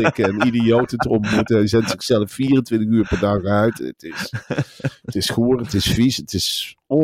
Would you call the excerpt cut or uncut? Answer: uncut